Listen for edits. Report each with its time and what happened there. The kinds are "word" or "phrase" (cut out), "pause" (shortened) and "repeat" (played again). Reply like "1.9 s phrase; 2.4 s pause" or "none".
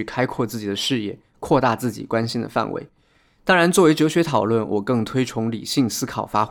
none